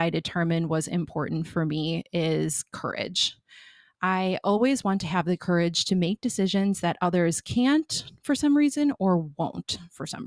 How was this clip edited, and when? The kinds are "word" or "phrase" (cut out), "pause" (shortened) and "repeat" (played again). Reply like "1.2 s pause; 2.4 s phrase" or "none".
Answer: none